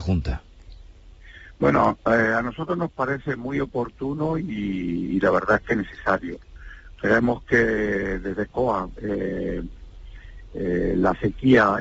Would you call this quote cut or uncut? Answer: uncut